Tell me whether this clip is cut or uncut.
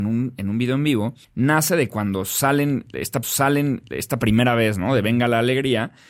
cut